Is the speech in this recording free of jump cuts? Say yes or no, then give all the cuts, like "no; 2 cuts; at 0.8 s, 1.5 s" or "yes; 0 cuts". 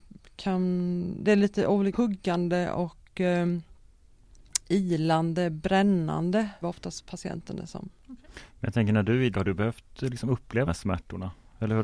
no; 4 cuts; at 1.9 s, 6.6 s, 9.3 s, 10.7 s